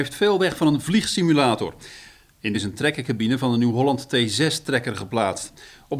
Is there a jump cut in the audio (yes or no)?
yes